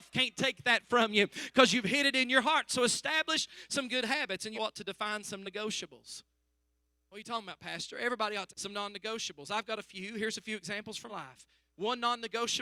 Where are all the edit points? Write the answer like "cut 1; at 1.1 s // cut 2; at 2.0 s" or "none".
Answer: cut 1; at 4.5 s // cut 2; at 5.4 s // cut 3; at 8.5 s // cut 4; at 11.1 s